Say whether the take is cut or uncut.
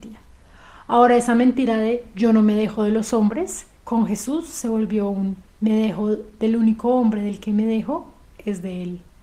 cut